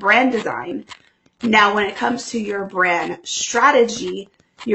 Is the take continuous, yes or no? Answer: yes